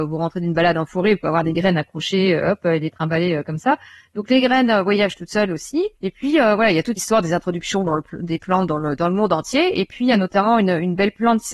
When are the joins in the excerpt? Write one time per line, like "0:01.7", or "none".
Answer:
0:05.9
0:07.0